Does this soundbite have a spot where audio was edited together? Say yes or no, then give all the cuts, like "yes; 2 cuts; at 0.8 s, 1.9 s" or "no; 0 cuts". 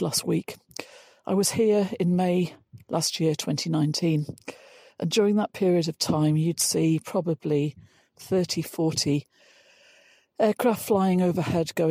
no; 0 cuts